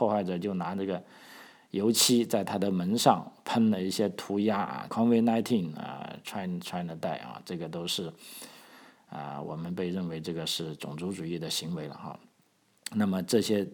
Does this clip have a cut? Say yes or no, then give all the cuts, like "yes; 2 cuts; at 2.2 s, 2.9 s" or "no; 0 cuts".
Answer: yes; 1 cut; at 4.9 s